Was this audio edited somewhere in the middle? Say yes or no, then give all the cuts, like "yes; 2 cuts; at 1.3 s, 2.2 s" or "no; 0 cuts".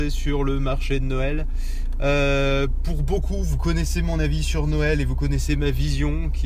no; 0 cuts